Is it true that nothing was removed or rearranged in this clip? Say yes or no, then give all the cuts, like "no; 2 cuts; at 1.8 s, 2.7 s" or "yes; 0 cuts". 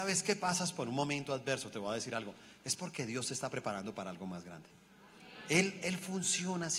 yes; 0 cuts